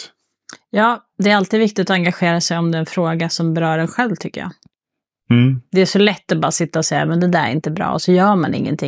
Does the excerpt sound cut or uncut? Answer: uncut